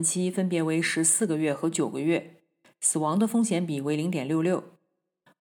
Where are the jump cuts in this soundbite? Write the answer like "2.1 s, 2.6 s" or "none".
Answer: none